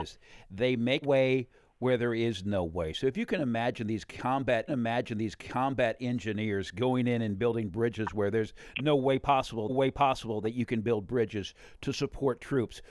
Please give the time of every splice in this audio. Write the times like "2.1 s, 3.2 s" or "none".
1.0 s, 4.7 s, 9.7 s

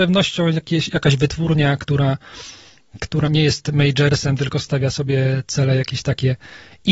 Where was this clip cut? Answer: 3.3 s

